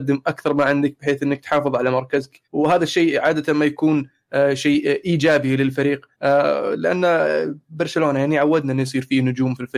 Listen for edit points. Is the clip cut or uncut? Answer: cut